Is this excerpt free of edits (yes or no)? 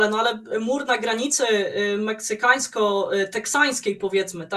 yes